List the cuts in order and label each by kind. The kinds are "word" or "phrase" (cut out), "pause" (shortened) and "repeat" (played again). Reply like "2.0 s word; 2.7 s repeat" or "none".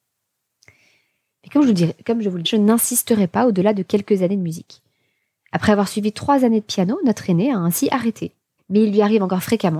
2.4 s word; 8.6 s pause